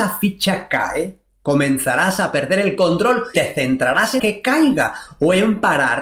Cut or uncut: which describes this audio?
cut